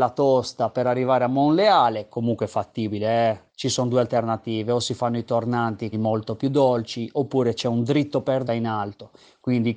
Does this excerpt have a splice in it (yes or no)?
yes